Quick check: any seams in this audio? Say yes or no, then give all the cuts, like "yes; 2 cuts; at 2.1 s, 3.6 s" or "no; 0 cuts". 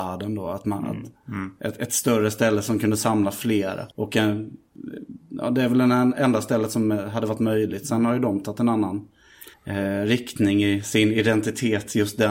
yes; 2 cuts; at 3.9 s, 9.5 s